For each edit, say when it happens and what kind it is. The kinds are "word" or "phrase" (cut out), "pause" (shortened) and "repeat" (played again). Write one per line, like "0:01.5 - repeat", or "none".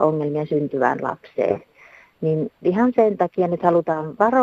0:02.5 - word